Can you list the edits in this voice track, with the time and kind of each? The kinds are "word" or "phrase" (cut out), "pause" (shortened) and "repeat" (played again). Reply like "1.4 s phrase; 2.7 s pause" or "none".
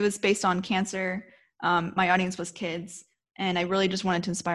none